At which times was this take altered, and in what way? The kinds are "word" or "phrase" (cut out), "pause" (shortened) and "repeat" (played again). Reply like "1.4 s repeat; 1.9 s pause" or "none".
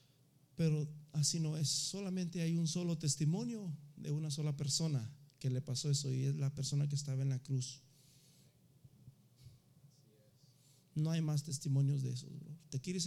none